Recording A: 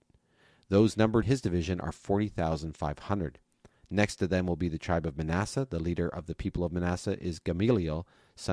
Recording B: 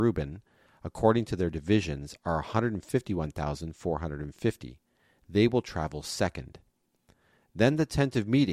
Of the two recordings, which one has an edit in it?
A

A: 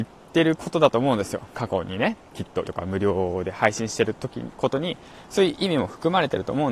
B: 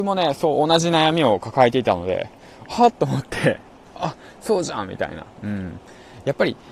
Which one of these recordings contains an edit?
A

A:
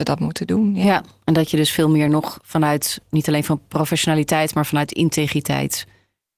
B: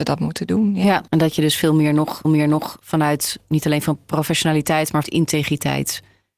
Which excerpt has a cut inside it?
B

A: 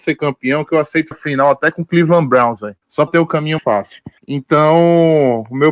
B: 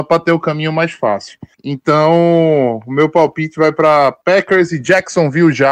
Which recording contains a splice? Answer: A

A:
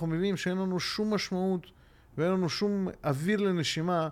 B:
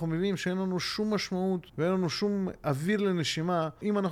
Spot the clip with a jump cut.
B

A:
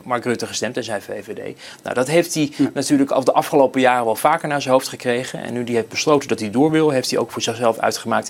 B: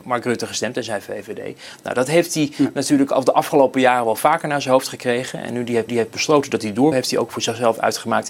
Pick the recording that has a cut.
B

